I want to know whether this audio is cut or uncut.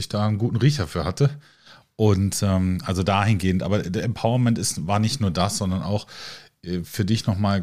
uncut